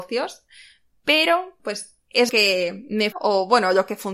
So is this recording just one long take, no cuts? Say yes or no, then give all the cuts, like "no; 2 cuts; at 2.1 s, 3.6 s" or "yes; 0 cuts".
no; 3 cuts; at 1.6 s, 2.3 s, 3.1 s